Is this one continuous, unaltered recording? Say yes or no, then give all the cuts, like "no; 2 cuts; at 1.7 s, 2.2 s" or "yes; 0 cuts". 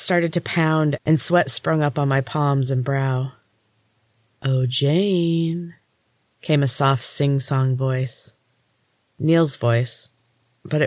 yes; 0 cuts